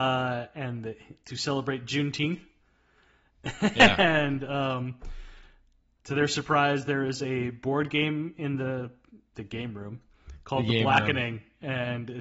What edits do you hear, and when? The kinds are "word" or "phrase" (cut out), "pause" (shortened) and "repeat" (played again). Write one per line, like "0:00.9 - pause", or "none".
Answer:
none